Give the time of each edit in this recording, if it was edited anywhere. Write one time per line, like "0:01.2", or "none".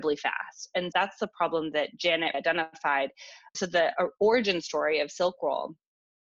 0:00.9
0:02.3
0:03.5